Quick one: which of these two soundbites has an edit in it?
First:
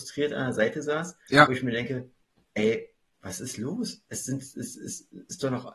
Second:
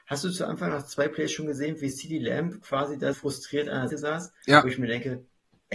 second; 2 cuts; at 3.1 s, 3.9 s

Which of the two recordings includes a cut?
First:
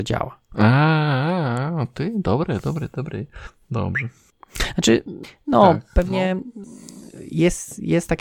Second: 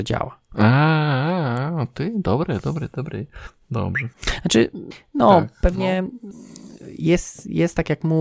second; 1 cut; at 4.1 s

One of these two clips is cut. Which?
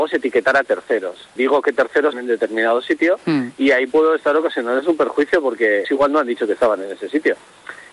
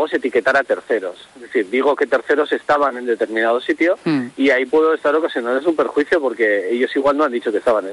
first; 3 cuts; at 1.4 s, 2.1 s, 5.8 s

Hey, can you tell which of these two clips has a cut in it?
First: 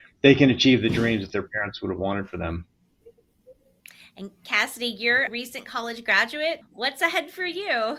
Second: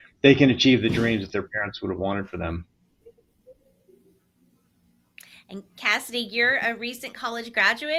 first; 3 cuts; at 3.8 s, 5.3 s, 6.6 s

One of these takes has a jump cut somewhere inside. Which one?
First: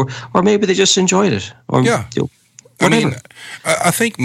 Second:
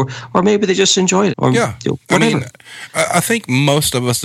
second; 2 cuts; at 1.3 s, 2.0 s

